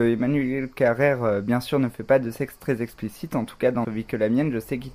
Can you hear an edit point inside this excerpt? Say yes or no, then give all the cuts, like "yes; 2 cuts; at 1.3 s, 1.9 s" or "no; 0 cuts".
yes; 1 cut; at 3.8 s